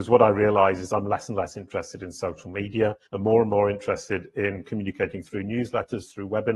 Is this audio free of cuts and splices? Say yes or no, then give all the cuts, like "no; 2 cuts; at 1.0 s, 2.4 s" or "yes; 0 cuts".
no; 1 cut; at 3.0 s